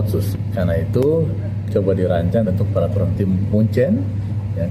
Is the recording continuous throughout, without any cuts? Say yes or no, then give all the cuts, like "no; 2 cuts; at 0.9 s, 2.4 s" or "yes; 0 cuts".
no; 4 cuts; at 1.7 s, 2.4 s, 3.1 s, 3.5 s